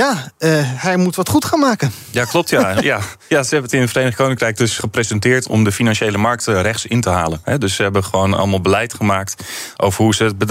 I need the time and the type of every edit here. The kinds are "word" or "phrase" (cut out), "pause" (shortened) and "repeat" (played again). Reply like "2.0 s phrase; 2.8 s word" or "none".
3.2 s pause; 4.8 s word